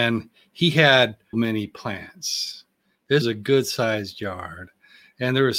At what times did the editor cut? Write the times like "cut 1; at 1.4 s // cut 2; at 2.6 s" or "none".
cut 1; at 1.3 s // cut 2; at 3.2 s